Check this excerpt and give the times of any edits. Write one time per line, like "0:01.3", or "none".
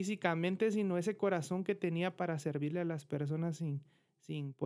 none